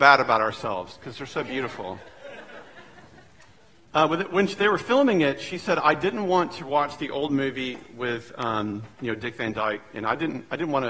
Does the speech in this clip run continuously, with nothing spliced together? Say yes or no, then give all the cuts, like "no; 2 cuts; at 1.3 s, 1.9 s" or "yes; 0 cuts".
yes; 0 cuts